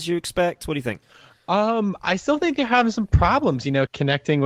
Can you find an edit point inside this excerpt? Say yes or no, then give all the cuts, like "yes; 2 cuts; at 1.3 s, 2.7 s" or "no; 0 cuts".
no; 0 cuts